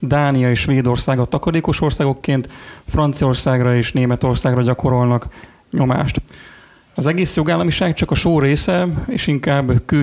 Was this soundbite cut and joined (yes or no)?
no